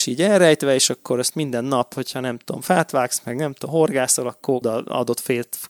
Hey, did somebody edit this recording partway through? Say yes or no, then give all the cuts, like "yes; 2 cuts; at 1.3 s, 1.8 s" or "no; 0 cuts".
yes; 1 cut; at 4.6 s